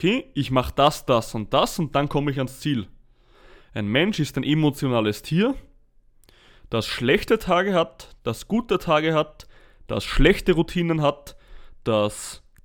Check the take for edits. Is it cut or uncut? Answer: uncut